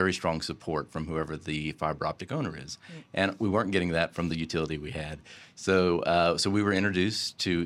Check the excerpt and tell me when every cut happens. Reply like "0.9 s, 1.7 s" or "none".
none